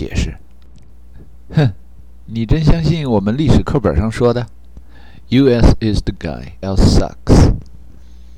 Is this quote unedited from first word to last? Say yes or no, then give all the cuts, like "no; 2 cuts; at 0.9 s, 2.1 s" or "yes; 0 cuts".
no; 2 cuts; at 6.2 s, 6.6 s